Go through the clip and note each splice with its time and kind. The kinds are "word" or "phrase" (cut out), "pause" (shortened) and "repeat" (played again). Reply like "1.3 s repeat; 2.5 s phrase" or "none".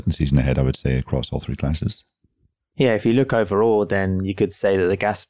none